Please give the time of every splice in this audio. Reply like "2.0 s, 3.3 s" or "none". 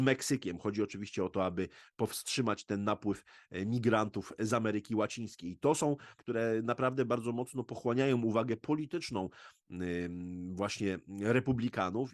6.2 s